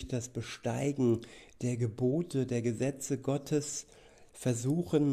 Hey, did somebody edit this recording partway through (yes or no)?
no